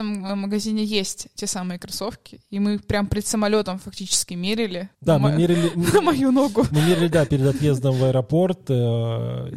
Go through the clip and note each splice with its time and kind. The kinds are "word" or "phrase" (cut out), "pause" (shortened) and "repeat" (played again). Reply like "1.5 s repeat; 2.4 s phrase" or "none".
4.9 s pause